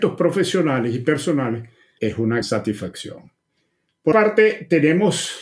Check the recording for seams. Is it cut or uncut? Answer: cut